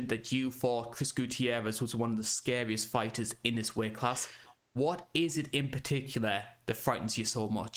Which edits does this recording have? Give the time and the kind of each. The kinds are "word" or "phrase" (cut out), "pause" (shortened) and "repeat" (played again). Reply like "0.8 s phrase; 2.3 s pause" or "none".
none